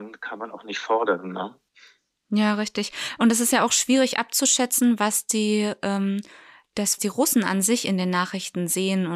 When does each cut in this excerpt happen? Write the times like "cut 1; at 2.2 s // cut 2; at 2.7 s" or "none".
cut 1; at 7.0 s

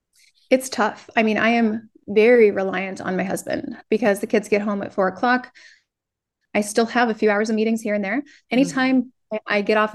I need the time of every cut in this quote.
cut 1; at 3.8 s

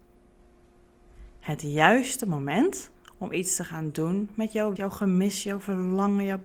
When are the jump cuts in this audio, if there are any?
cut 1; at 2.9 s // cut 2; at 4.8 s

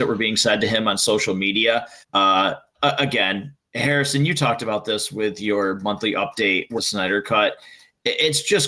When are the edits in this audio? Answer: cut 1; at 2.0 s // cut 2; at 6.8 s

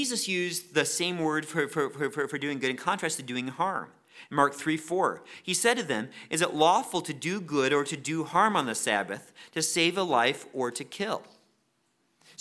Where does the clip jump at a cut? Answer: none

